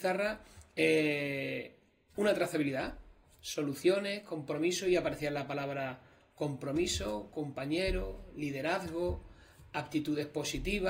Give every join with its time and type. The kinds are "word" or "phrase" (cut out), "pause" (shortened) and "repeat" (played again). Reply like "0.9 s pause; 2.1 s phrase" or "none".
none